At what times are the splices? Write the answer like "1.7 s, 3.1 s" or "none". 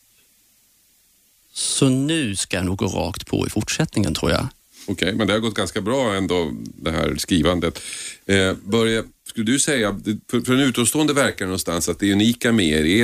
9.2 s